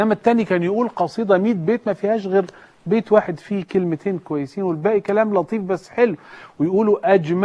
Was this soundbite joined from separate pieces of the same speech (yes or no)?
no